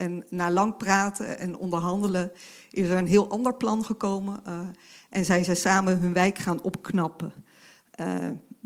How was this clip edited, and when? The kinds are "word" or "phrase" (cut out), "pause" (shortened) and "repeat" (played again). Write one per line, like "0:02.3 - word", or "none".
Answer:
none